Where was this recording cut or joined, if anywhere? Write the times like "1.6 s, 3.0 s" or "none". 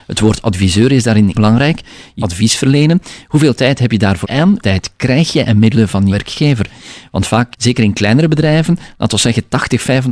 1.3 s, 2.2 s, 4.2 s, 4.6 s, 6.1 s, 7.5 s